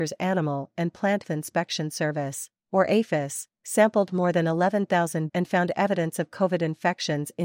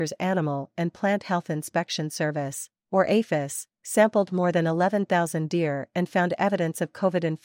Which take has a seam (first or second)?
first